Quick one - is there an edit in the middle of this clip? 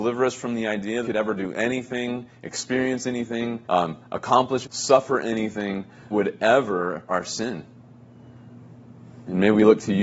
yes; 5 cuts; at 1.0 s, 3.6 s, 4.6 s, 6.1 s, 7.1 s

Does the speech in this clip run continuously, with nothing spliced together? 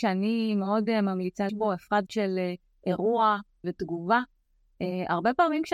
no; 3 cuts; at 1.5 s, 2.1 s, 3.6 s

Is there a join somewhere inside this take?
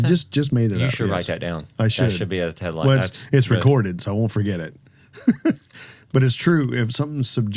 no; 0 cuts

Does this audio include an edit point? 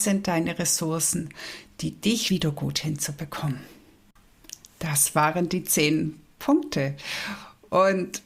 yes; 2 cuts; at 2.3 s, 4.6 s

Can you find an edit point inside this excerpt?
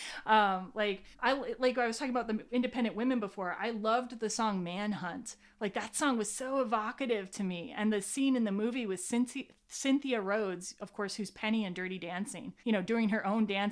yes; 2 cuts; at 1.1 s, 12.6 s

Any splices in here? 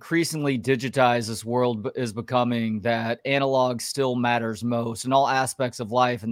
no; 0 cuts

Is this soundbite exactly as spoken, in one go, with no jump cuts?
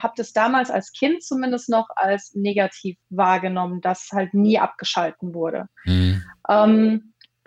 no; 1 cut; at 3.0 s

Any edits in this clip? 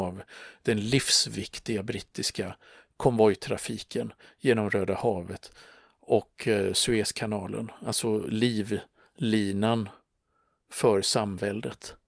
no; 0 cuts

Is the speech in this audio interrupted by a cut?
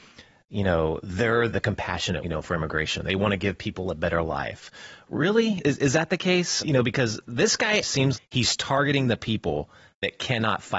yes; 6 cuts; at 1.5 s, 2.2 s, 5.6 s, 6.6 s, 7.8 s, 8.1 s

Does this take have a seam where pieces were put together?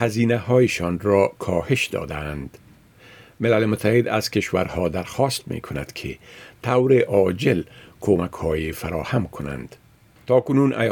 no; 0 cuts

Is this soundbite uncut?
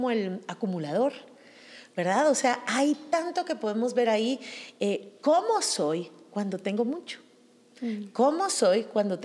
yes; 0 cuts

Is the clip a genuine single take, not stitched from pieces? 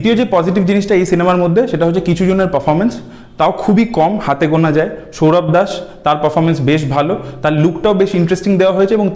yes; 0 cuts

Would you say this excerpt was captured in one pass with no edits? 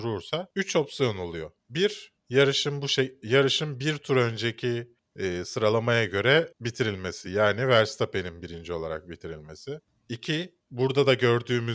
yes; 0 cuts

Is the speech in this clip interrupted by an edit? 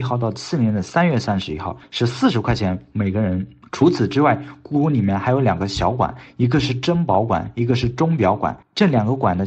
no; 0 cuts

